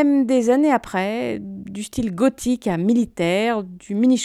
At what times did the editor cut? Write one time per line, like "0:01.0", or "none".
none

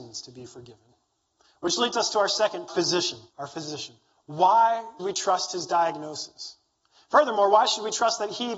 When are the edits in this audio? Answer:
0:01.1
0:02.7
0:03.3
0:05.0
0:06.7

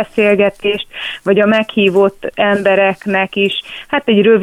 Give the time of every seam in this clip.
none

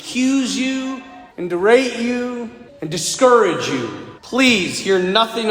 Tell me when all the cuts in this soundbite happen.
0:01.3
0:02.7
0:04.2

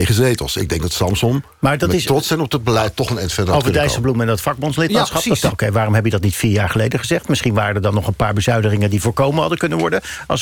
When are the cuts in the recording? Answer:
0:05.5

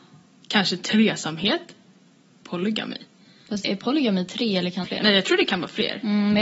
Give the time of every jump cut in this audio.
0:03.6
0:04.8

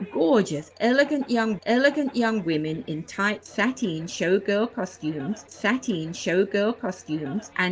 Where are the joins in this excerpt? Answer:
0:01.6
0:05.5

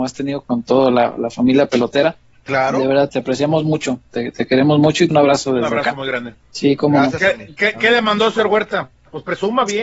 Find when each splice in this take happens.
0:03.1
0:05.1
0:06.4

